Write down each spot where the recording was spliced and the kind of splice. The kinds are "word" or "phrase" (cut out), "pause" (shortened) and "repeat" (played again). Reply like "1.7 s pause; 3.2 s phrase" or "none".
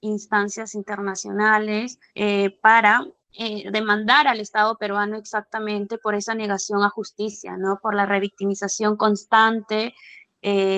2.1 s pause; 3.2 s pause